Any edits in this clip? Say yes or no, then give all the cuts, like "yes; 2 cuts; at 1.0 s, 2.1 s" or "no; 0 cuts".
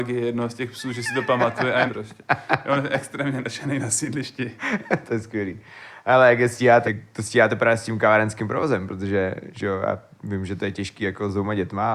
yes; 3 cuts; at 1.9 s, 4.6 s, 6.8 s